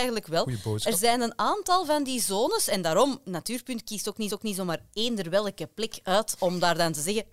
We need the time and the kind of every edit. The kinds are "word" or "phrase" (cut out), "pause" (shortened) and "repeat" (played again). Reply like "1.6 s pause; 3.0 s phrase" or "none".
4.3 s repeat